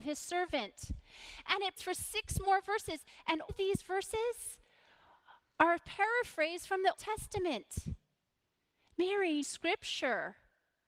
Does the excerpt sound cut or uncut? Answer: cut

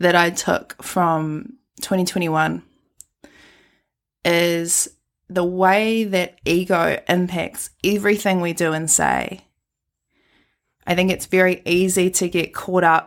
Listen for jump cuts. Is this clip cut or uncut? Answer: uncut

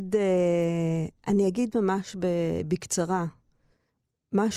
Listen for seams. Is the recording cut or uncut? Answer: uncut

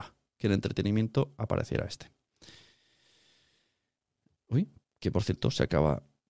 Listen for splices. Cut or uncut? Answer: uncut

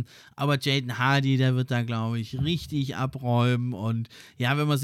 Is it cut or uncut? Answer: uncut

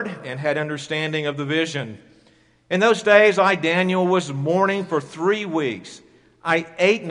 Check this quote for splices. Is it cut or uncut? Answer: uncut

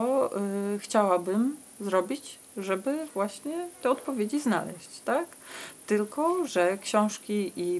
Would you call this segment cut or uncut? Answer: uncut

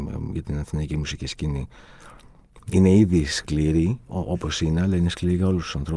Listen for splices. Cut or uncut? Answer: uncut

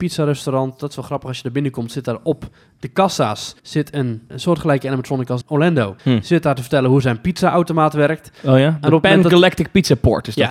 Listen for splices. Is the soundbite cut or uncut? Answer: cut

